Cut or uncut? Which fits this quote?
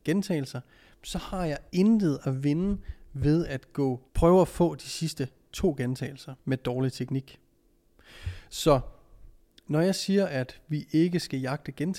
cut